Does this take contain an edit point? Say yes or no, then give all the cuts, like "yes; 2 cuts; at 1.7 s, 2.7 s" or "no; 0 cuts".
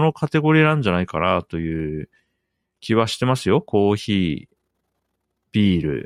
no; 0 cuts